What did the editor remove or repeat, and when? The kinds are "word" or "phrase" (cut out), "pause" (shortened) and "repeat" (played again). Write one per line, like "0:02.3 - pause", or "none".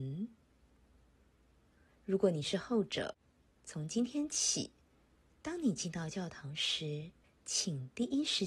0:07.2 - pause